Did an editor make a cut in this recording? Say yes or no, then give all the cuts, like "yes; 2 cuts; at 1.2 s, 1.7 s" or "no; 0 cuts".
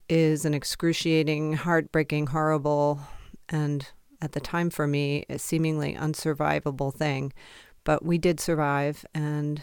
no; 0 cuts